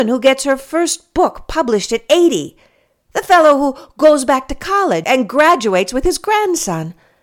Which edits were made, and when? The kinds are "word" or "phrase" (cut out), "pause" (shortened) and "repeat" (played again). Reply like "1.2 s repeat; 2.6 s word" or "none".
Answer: 5.0 s word

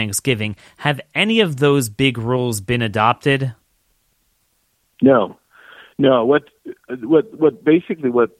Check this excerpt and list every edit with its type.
none

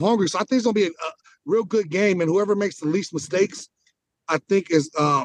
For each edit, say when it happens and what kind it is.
none

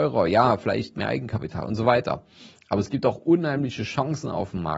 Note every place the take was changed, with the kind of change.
none

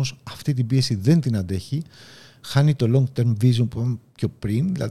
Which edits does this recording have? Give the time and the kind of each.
none

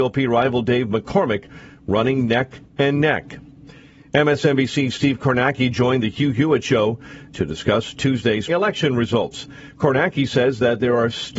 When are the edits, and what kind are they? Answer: 2.7 s pause; 8.5 s word

